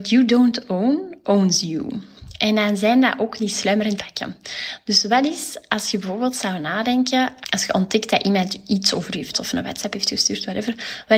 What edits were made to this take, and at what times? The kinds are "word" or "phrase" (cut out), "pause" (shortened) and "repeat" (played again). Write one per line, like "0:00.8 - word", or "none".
0:03.4 - word
0:04.0 - word
0:07.4 - word
0:09.3 - word